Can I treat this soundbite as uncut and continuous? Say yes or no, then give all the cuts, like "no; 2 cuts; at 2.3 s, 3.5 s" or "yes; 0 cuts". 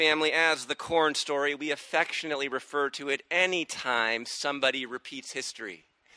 yes; 0 cuts